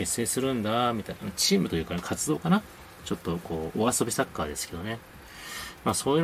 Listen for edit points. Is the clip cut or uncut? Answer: uncut